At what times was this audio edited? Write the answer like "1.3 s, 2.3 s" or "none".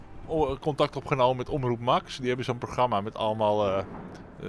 none